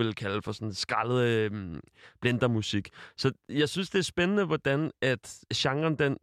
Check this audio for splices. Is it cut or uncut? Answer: uncut